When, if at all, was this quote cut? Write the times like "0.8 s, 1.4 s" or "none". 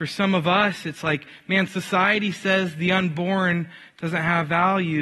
none